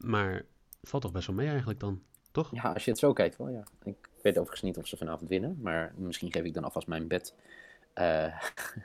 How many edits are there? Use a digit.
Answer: 0